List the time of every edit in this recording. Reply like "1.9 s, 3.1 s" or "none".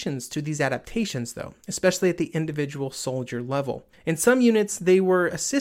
3.9 s